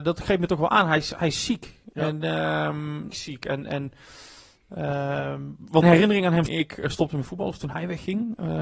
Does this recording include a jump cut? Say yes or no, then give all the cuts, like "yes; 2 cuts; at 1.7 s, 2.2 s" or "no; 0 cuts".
yes; 3 cuts; at 3.1 s, 5.8 s, 6.5 s